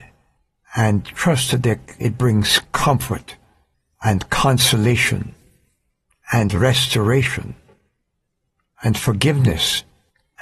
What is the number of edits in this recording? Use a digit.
0